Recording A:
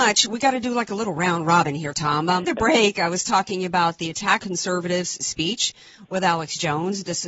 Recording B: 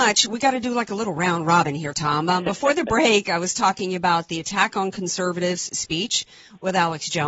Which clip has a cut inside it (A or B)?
A